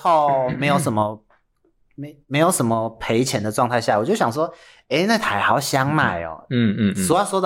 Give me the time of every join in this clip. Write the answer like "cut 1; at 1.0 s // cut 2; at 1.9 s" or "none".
none